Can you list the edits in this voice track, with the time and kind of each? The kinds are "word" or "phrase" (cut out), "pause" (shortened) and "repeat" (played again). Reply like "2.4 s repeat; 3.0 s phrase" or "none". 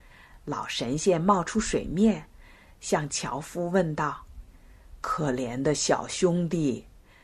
none